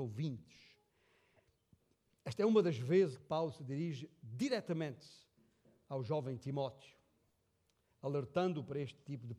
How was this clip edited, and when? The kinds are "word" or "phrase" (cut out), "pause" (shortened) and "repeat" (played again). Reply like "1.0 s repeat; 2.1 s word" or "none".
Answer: 3.1 s word